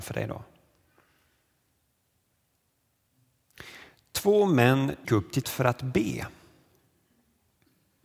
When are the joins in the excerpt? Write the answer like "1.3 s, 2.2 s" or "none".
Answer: 5.0 s, 5.4 s